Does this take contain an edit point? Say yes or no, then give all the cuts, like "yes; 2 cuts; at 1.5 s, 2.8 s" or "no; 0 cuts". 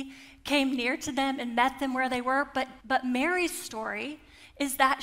yes; 1 cut; at 2.8 s